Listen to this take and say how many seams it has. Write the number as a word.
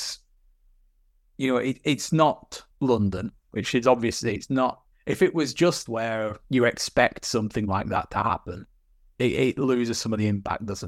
five